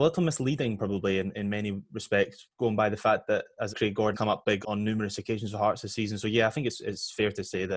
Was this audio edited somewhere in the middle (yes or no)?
yes